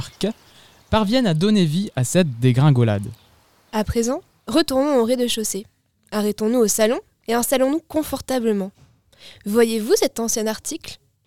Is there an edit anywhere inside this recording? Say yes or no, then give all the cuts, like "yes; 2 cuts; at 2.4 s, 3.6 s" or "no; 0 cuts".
no; 0 cuts